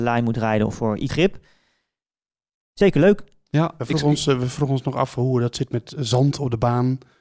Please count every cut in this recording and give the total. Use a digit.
1